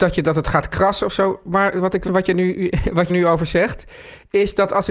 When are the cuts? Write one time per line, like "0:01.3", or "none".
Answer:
0:02.1
0:03.1